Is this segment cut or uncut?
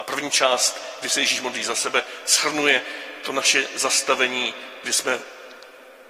uncut